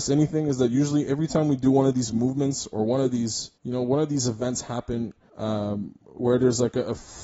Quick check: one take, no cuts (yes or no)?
no